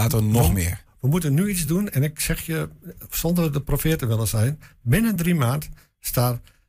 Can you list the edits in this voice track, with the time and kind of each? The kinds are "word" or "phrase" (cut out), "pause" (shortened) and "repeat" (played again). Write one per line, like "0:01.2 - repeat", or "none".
none

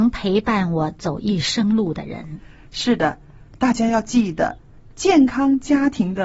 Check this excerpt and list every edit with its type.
none

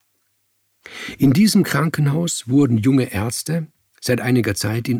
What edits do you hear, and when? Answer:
none

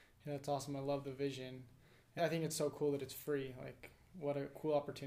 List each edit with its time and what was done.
0:02.2 - phrase

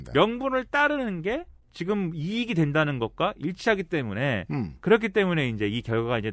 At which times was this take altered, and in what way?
none

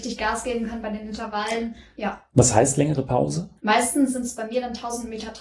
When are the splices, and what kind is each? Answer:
0:03.6 - pause

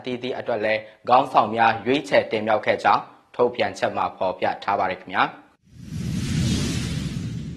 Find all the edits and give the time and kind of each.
none

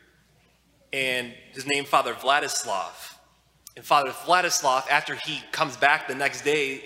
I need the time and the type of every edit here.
none

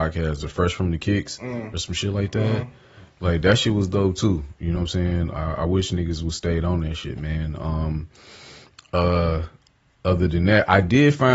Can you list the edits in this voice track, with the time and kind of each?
none

